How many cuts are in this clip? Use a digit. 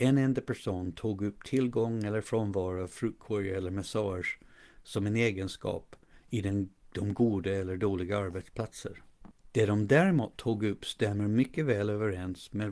0